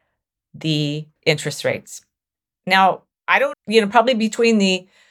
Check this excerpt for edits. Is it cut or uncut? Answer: cut